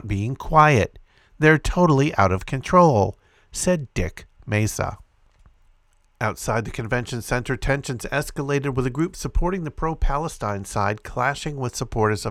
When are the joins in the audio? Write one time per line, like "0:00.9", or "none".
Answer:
none